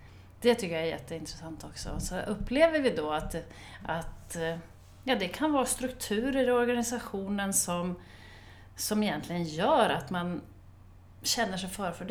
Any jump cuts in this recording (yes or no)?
no